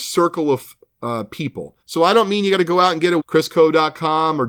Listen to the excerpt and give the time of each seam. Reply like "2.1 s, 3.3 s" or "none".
1.8 s, 3.2 s